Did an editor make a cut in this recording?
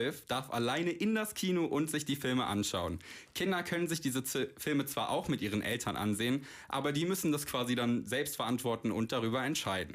no; 0 cuts

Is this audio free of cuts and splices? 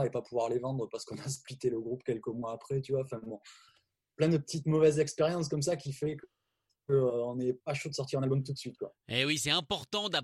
yes; 0 cuts

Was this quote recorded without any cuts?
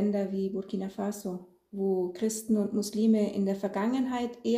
yes; 0 cuts

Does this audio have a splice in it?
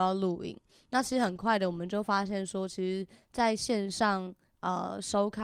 no; 0 cuts

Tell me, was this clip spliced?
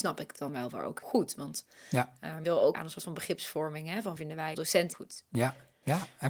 yes; 6 cuts; at 1.0 s, 2.4 s, 2.7 s, 4.2 s, 4.5 s, 4.9 s

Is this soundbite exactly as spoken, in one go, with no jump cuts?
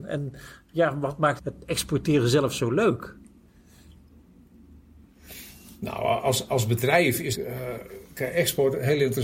no; 2 cuts; at 1.4 s, 7.3 s

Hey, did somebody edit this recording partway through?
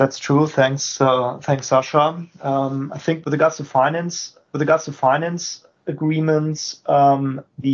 yes; 2 cuts; at 3.2 s, 4.5 s

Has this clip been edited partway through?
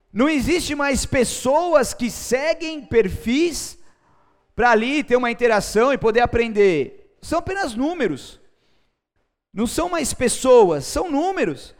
no; 0 cuts

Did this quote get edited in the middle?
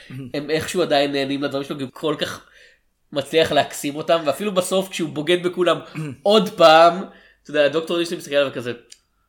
yes; 1 cut; at 1.9 s

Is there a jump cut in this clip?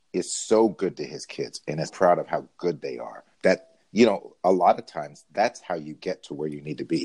yes; 2 cuts; at 1.9 s, 3.3 s

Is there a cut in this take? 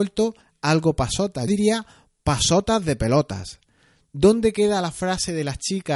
yes; 1 cut; at 1.5 s

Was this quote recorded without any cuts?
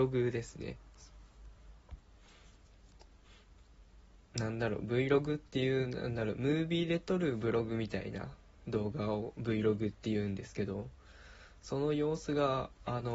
yes; 0 cuts

